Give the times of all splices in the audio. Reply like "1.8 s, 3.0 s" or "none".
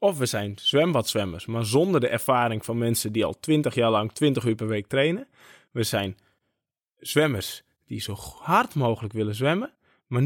none